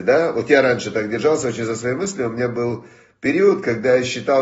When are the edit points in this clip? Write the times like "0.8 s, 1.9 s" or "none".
none